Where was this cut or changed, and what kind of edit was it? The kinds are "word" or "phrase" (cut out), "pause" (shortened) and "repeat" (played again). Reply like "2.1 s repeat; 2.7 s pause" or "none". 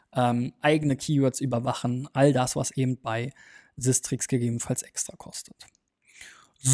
none

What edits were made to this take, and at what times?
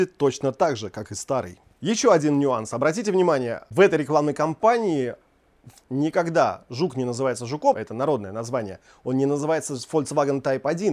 5.8 s word; 7.7 s word

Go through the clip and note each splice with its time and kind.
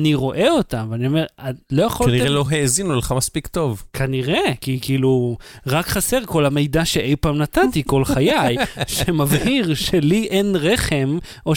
none

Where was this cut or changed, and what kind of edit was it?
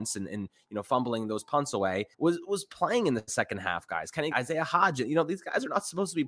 2.1 s pause; 4.3 s word

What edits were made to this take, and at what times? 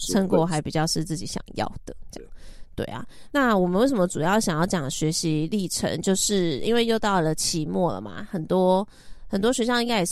3.3 s word

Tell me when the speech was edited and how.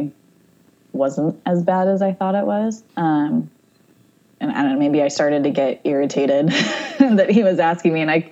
2.9 s pause

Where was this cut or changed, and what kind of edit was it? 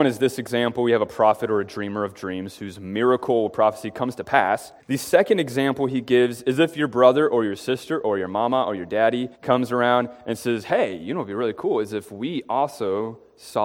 4.8 s pause; 9.4 s pause

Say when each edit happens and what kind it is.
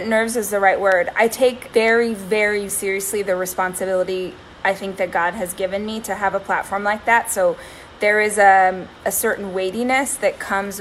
1.7 s word; 2.7 s word

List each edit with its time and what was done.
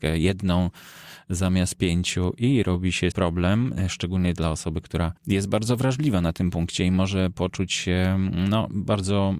3.1 s phrase; 5.2 s pause

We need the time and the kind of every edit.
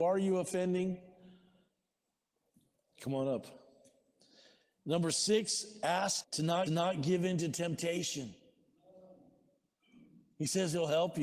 6.2 s phrase; 6.7 s repeat

